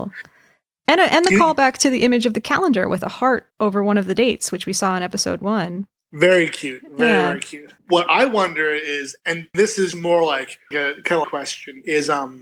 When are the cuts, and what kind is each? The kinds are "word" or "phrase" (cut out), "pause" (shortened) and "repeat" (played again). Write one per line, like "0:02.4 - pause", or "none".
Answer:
0:03.5 - pause
0:06.0 - pause
0:09.5 - word
0:09.9 - word
0:10.7 - word
0:11.2 - phrase